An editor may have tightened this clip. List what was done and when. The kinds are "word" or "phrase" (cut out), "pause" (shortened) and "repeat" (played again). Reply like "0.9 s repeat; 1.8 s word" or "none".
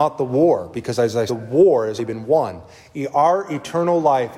1.3 s word; 2.0 s word